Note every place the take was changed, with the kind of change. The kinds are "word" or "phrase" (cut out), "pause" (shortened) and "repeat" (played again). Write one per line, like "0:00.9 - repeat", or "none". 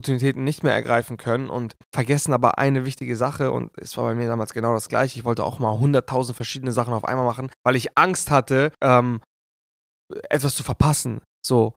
0:01.8 - pause
0:07.5 - pause
0:08.7 - pause